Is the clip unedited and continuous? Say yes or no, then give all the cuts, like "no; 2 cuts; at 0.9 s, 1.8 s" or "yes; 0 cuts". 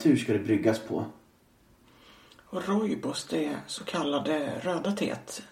yes; 0 cuts